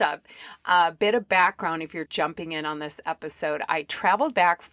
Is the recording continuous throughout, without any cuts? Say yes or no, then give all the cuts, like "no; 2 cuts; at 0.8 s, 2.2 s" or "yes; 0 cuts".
no; 1 cut; at 2.1 s